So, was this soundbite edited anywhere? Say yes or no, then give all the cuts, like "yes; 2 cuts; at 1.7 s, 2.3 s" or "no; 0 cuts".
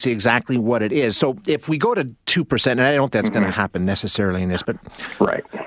yes; 2 cuts; at 3.1 s, 4.6 s